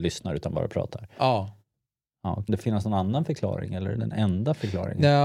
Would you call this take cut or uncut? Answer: cut